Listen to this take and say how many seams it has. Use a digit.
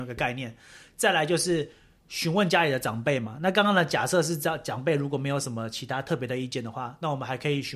0